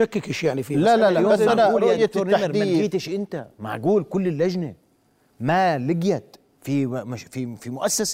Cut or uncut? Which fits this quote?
uncut